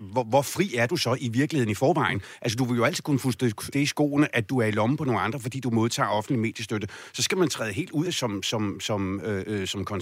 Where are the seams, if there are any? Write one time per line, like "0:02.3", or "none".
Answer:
0:03.7
0:08.0